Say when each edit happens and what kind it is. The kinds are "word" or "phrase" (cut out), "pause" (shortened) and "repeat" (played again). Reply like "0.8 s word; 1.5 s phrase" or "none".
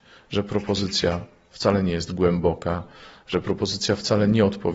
none